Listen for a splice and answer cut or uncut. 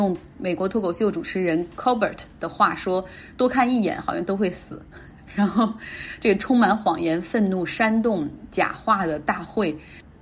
uncut